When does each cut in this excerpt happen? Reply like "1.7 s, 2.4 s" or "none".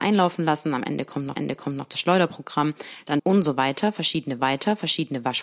1.3 s, 3.2 s, 4.4 s